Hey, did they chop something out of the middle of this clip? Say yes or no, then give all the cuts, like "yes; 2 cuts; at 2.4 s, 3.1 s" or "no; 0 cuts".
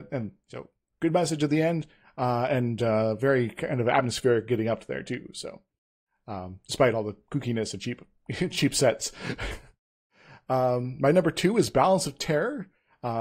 no; 0 cuts